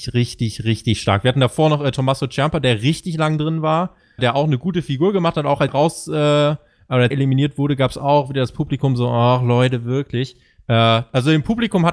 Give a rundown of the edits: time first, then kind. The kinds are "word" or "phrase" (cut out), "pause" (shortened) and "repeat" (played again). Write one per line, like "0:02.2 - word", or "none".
0:04.2 - word
0:05.7 - word
0:07.1 - word

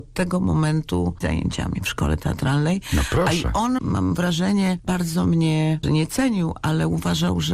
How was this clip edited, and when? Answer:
0:01.2 - word
0:03.8 - word
0:05.8 - word

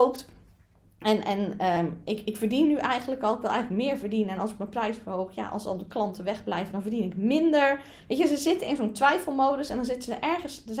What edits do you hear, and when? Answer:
none

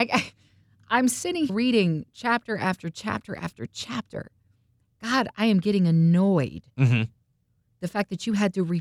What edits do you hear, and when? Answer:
0:01.5 - word

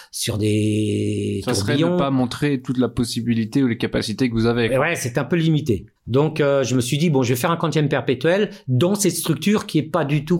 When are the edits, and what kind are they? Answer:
0:06.0 - pause

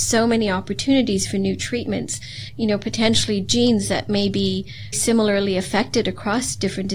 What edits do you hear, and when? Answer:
0:02.5 - phrase
0:04.9 - word

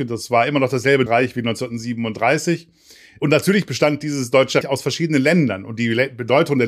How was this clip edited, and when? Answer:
0:01.1 - word
0:04.6 - word

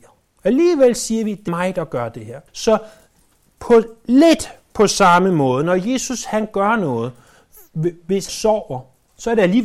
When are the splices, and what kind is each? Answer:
0:01.5 - word
0:02.5 - pause
0:08.3 - phrase

